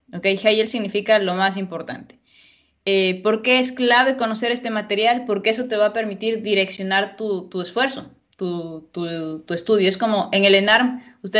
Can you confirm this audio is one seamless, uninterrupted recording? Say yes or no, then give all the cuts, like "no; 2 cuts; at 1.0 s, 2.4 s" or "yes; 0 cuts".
yes; 0 cuts